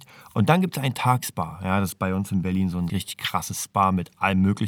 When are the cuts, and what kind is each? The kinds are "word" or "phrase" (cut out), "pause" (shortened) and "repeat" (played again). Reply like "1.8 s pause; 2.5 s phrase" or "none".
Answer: 1.2 s phrase; 2.9 s word